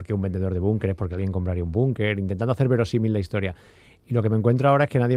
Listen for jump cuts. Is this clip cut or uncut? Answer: uncut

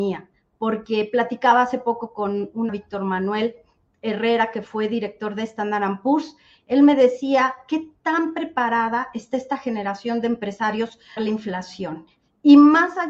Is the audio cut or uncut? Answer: cut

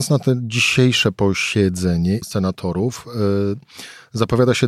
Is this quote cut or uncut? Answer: cut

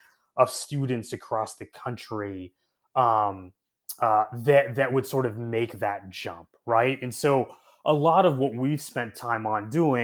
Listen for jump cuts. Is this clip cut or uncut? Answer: uncut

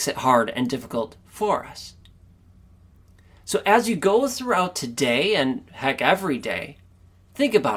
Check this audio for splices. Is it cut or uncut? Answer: uncut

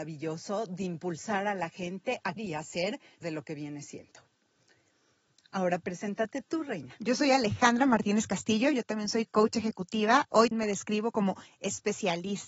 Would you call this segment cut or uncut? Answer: cut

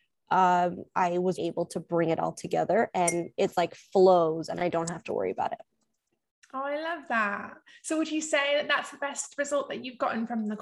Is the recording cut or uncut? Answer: cut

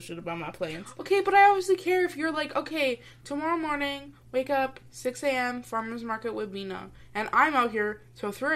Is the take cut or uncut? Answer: uncut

